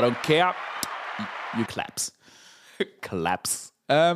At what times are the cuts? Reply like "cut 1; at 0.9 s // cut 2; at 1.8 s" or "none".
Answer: cut 1; at 1.7 s